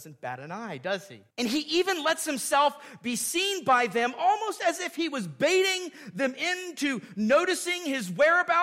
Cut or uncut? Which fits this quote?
cut